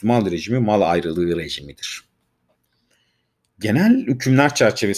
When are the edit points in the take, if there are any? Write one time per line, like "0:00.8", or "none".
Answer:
none